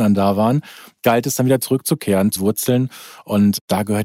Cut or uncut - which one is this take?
cut